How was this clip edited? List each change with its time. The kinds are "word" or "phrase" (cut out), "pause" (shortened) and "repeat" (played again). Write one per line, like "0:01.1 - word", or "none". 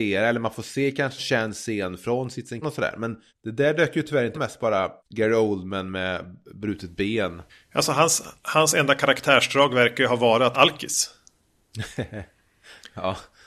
0:01.2 - word
0:02.6 - phrase
0:03.3 - pause
0:04.3 - phrase
0:05.0 - pause
0:07.5 - pause
0:08.4 - pause
0:10.5 - phrase

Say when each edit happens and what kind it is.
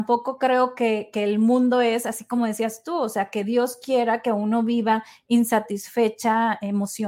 none

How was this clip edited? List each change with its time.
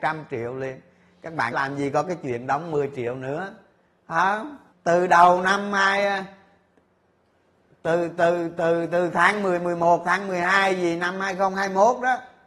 0:01.5 - phrase
0:04.7 - pause

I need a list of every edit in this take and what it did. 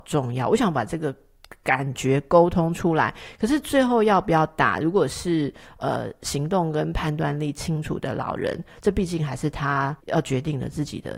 0:10.0 - pause

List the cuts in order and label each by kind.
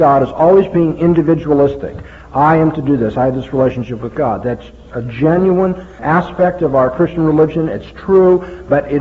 0:06.0 - word

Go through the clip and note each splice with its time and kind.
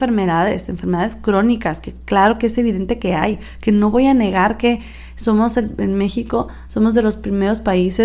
none

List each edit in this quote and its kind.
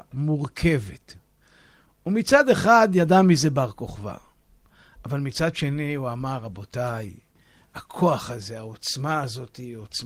none

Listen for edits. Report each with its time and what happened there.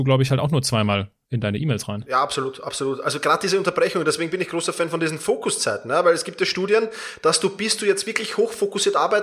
none

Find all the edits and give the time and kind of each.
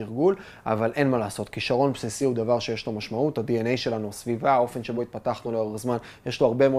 none

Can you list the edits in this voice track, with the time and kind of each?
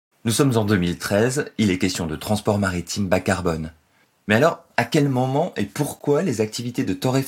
none

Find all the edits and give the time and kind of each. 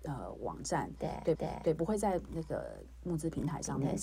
0:01.3 - repeat

